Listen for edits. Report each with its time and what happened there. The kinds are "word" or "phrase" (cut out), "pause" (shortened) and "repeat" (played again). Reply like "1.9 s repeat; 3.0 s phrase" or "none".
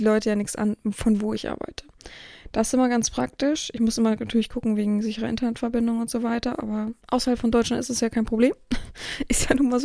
7.0 s pause